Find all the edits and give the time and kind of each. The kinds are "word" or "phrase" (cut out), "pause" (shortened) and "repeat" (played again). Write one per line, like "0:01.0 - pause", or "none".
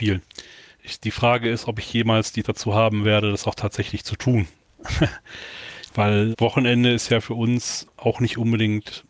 0:02.4 - word
0:06.3 - word